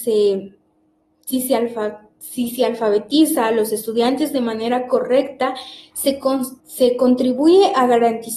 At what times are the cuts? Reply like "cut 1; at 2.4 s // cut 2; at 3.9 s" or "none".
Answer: cut 1; at 6.6 s

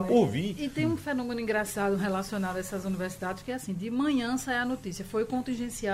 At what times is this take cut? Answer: none

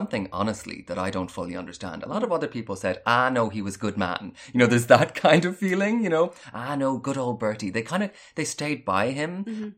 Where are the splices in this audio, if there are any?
none

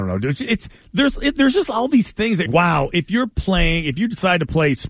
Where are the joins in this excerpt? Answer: cut 1; at 2.5 s

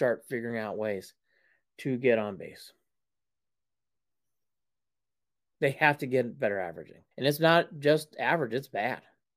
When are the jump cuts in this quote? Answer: cut 1; at 7.1 s

